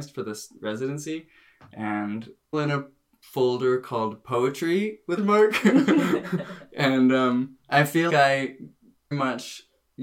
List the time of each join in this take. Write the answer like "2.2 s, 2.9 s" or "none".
2.5 s, 5.2 s, 7.6 s, 8.1 s, 9.1 s